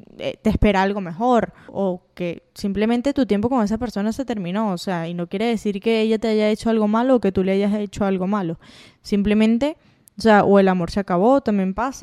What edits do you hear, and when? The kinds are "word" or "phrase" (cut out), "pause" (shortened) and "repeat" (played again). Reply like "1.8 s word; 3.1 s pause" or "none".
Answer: 1.7 s word